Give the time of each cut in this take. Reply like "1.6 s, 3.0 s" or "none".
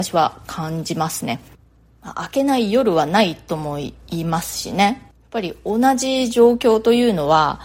none